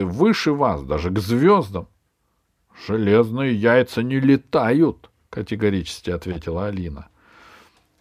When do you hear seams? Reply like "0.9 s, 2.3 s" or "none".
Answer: none